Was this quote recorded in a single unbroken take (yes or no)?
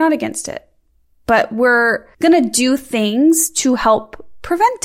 no